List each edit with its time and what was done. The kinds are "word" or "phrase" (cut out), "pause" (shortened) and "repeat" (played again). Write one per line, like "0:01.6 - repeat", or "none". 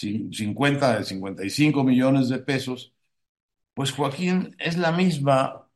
none